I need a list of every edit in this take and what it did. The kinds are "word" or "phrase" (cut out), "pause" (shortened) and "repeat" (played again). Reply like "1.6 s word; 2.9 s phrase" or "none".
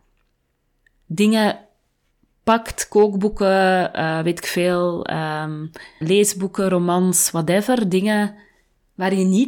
6.0 s word